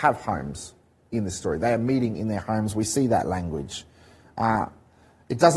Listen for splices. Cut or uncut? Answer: uncut